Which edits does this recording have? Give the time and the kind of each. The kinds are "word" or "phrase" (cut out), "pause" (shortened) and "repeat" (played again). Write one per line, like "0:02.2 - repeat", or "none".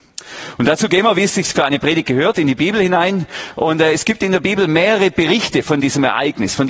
none